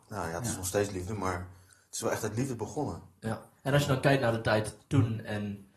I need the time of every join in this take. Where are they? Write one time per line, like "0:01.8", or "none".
none